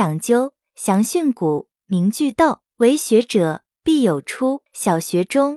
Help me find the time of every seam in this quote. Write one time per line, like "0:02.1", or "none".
0:02.7
0:04.7